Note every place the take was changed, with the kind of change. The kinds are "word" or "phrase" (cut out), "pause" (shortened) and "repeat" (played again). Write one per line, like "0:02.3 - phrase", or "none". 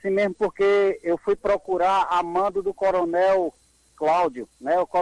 none